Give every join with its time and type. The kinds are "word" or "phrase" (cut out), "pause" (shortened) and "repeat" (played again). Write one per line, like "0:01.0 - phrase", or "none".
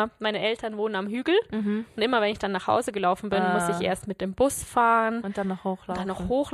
none